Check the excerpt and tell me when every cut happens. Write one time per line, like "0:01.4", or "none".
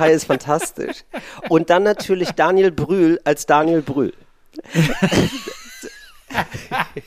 none